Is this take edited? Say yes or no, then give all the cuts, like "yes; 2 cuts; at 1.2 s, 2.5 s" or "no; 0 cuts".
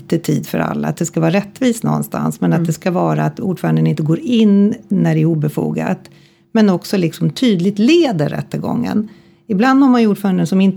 no; 0 cuts